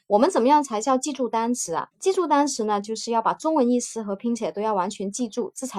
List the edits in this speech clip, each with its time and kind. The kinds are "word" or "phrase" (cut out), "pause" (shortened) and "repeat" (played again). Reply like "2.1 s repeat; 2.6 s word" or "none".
1.9 s pause